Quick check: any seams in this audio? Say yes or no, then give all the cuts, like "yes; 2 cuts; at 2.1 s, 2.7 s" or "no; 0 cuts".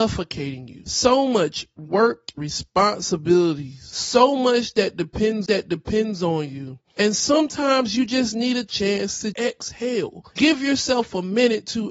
yes; 3 cuts; at 2.4 s, 5.5 s, 9.3 s